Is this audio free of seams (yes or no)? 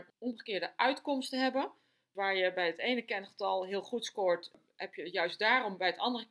yes